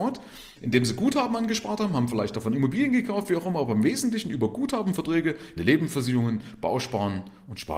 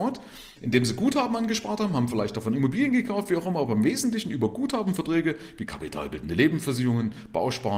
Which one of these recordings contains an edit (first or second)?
first